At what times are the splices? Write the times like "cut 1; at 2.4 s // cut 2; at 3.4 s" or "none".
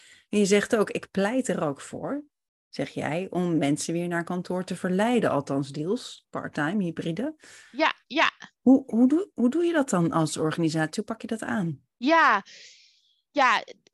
none